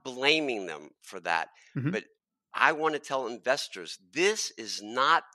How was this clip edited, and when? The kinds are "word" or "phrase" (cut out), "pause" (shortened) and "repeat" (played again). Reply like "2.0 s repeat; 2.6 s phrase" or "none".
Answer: none